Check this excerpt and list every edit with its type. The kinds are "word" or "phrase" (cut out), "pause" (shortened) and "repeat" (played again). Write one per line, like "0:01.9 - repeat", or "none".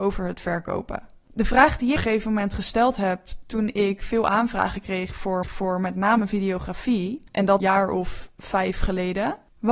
0:02.0 - phrase
0:05.4 - repeat
0:07.3 - pause
0:07.6 - phrase